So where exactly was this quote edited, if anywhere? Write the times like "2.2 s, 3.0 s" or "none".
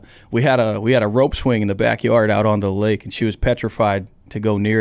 none